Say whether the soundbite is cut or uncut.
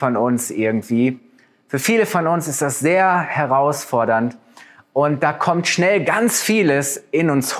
uncut